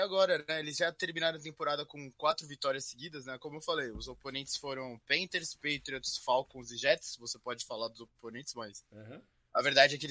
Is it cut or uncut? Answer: uncut